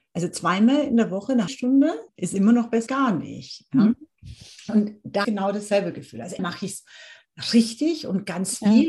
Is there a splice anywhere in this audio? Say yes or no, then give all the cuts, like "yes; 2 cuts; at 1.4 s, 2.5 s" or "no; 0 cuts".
yes; 5 cuts; at 1.5 s, 2.1 s, 2.9 s, 5.2 s, 6.4 s